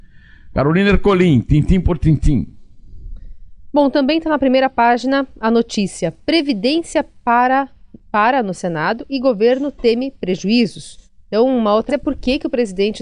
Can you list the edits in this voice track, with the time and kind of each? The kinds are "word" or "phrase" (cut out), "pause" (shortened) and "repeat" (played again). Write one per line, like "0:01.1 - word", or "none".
0:08.0 - pause
0:11.1 - pause
0:11.9 - word